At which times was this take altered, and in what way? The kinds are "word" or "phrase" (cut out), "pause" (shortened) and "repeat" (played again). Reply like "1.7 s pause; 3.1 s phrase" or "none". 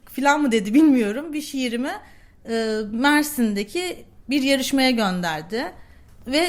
none